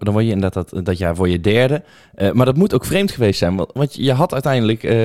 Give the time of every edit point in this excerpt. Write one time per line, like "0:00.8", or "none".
none